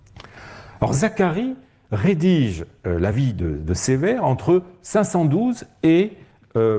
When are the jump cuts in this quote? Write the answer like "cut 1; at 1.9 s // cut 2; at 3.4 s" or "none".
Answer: none